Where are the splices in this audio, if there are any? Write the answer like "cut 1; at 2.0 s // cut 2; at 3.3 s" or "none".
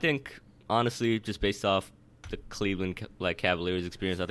none